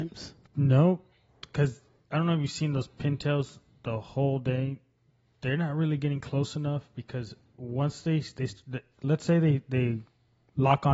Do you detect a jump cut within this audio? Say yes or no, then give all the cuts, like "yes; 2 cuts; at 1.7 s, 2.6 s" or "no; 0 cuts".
no; 0 cuts